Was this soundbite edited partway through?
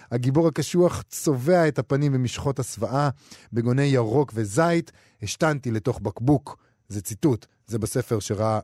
no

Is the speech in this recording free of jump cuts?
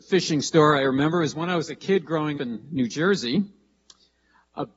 no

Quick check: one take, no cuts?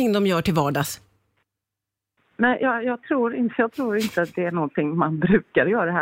yes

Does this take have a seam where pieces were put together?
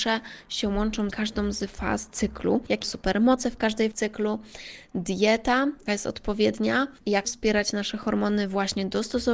yes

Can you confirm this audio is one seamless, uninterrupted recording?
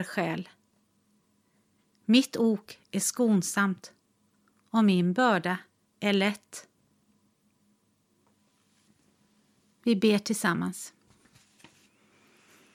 yes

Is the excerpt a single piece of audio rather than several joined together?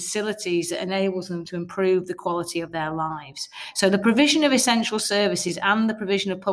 yes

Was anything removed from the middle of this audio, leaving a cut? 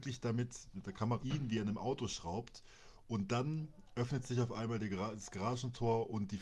yes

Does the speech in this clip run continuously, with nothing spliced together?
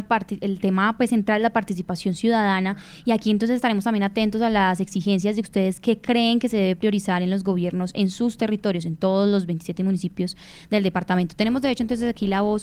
yes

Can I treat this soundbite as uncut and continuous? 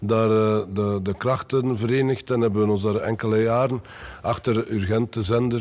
yes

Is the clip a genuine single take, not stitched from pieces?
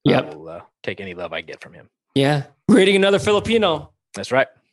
yes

